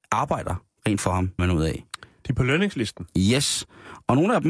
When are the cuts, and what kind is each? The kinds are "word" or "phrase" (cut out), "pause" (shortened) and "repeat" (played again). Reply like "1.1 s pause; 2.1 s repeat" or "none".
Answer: 1.0 s word; 1.4 s word